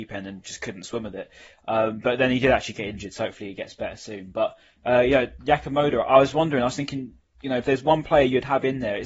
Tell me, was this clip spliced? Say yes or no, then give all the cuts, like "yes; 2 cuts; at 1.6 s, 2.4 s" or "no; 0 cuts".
no; 0 cuts